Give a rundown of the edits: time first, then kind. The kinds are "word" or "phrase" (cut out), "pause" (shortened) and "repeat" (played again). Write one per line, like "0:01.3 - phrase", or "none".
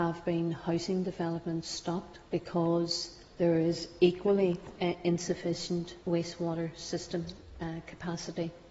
0:02.2 - pause
0:06.0 - pause